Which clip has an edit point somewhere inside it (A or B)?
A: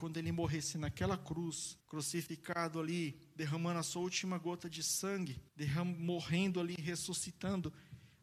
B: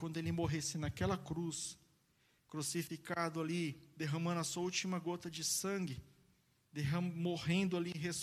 A